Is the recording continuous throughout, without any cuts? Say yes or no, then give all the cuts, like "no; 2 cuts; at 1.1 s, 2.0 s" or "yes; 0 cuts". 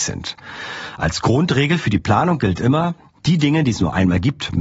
yes; 0 cuts